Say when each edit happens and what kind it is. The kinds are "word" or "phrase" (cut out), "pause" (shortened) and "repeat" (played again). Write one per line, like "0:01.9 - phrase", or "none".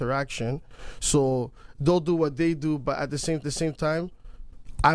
0:03.4 - repeat